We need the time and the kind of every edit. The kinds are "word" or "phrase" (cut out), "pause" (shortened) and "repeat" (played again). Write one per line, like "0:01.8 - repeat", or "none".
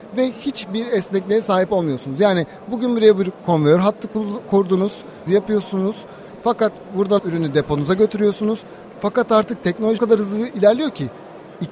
0:05.3 - word
0:07.2 - word
0:10.0 - word